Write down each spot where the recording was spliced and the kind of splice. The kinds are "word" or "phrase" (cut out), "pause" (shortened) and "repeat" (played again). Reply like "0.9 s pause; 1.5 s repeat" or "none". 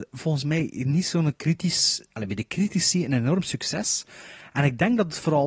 none